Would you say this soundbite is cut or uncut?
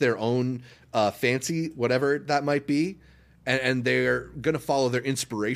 uncut